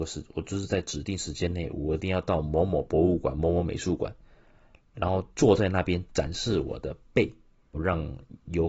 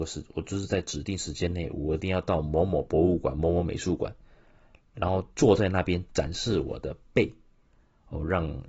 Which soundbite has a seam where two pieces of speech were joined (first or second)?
first